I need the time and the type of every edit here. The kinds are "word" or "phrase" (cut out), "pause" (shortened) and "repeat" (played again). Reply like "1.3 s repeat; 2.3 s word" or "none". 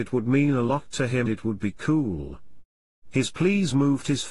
1.3 s word

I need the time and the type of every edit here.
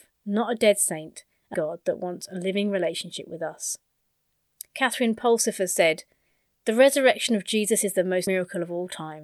1.5 s word; 8.3 s word

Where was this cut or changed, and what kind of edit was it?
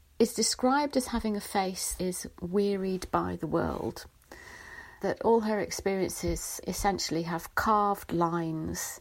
2.0 s word; 5.0 s word; 6.6 s word

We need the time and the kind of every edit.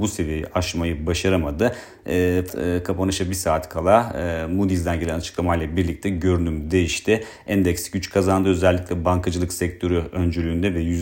2.5 s word

